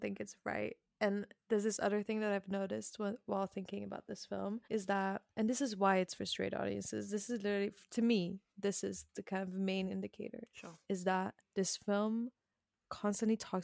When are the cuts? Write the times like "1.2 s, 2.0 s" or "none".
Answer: 4.6 s, 5.3 s, 10.8 s, 11.4 s